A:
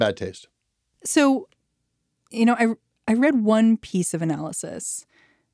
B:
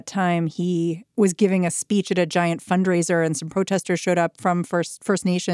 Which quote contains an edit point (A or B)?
B